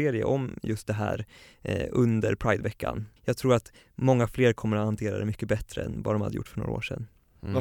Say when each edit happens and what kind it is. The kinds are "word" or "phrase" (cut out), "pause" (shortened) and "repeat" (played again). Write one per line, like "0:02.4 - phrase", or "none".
0:03.2 - pause

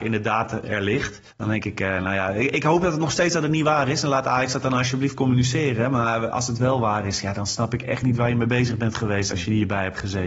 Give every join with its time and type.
0:01.3 - pause

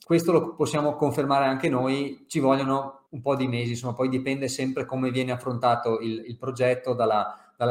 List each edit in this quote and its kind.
0:03.1 - pause

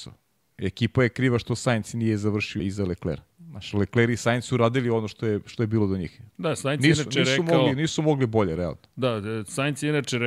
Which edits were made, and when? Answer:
0:02.6 - word
0:03.3 - pause
0:06.3 - pause

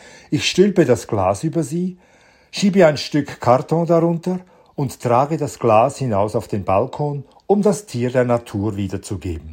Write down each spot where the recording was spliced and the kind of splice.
none

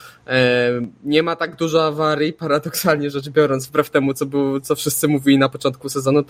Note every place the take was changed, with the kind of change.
none

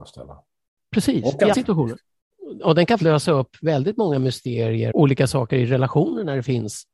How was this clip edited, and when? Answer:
0:01.5 - word
0:03.0 - word
0:04.9 - phrase

